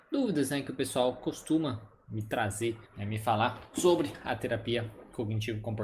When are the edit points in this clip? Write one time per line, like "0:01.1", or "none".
0:02.9